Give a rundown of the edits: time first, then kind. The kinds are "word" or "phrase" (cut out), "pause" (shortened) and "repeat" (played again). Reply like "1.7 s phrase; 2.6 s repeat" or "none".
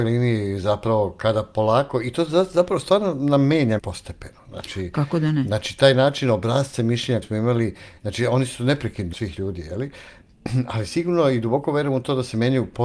3.8 s word; 7.2 s word; 9.1 s phrase